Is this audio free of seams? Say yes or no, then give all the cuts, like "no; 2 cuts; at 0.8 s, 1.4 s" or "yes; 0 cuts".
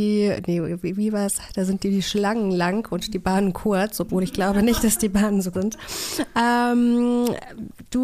no; 1 cut; at 5.5 s